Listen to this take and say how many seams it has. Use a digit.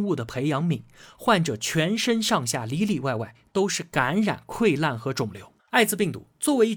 1